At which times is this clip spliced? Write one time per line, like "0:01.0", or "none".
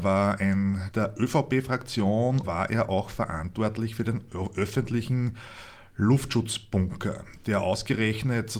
0:00.9
0:02.4